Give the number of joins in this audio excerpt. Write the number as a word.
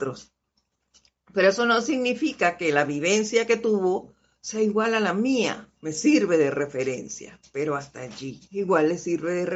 three